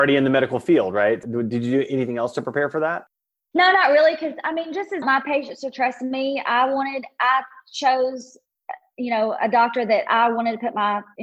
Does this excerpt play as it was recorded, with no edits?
no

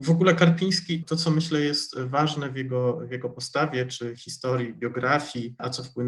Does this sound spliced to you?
no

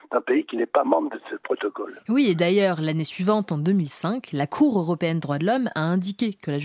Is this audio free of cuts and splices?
yes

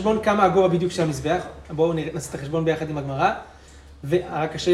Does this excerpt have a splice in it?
no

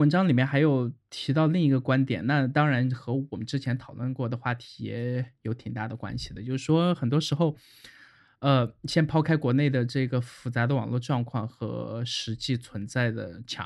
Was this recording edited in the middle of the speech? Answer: no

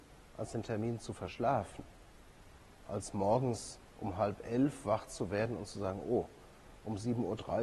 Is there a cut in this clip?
no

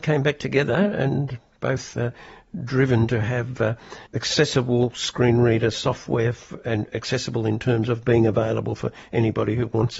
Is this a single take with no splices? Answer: no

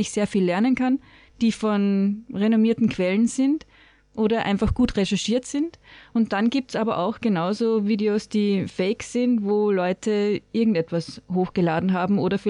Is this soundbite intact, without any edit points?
yes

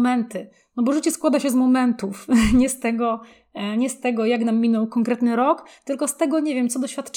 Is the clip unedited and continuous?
yes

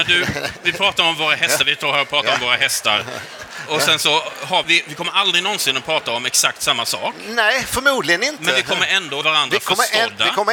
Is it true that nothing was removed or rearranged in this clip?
no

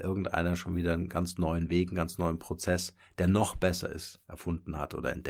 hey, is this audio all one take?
yes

